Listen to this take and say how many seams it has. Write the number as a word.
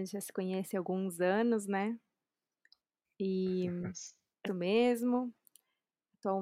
one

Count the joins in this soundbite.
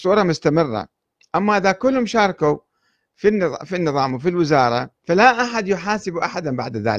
one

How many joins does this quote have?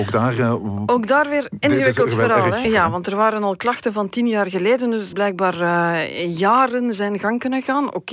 two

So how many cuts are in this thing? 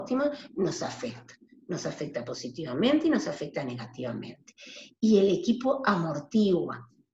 zero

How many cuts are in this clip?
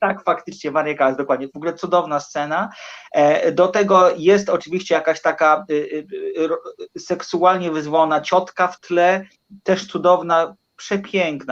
zero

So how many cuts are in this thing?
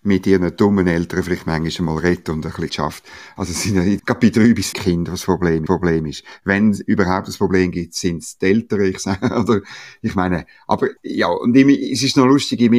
five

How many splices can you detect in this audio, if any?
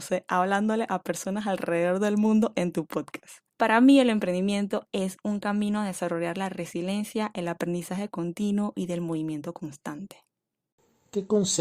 one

